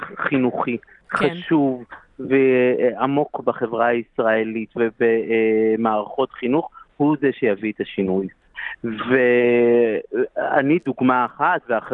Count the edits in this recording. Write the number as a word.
zero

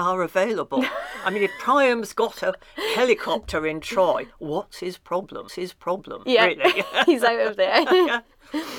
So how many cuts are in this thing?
one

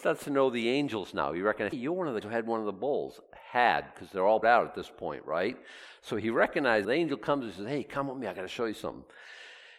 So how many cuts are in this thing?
four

